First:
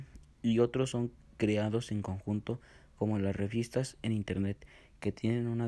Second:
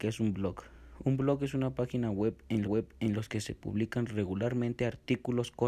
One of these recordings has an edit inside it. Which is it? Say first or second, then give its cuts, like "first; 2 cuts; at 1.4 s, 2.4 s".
second; 1 cut; at 2.6 s